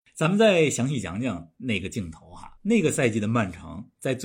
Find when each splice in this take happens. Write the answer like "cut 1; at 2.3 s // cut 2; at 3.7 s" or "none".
cut 1; at 2.6 s